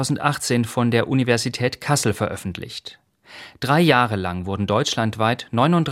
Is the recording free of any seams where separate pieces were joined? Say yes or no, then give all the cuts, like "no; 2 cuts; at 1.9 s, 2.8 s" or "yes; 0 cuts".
yes; 0 cuts